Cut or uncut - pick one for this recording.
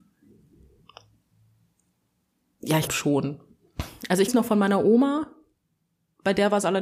cut